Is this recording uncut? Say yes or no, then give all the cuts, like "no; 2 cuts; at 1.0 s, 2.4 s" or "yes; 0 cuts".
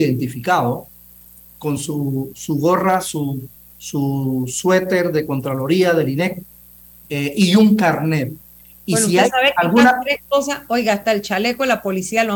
yes; 0 cuts